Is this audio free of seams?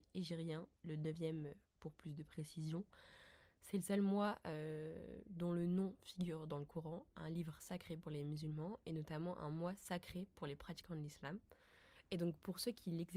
yes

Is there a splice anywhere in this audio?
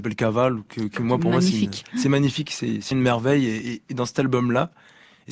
yes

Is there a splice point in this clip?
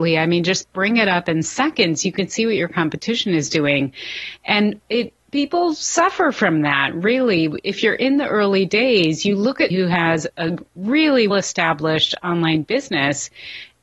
yes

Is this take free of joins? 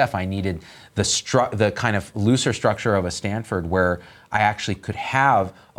yes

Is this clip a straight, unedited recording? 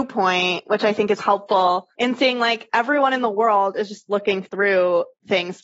no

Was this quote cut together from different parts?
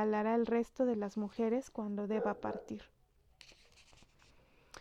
no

